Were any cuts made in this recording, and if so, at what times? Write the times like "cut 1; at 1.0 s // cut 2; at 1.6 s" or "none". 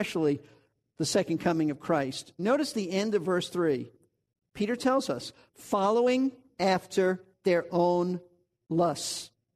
none